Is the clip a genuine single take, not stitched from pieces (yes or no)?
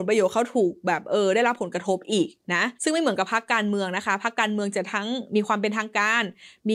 no